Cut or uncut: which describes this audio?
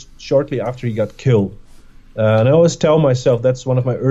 uncut